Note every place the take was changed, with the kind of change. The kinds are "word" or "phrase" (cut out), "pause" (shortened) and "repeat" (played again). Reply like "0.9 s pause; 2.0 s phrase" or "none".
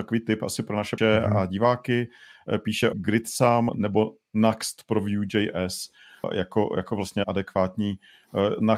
1.0 s word; 2.9 s word; 3.7 s word; 6.2 s word; 7.2 s word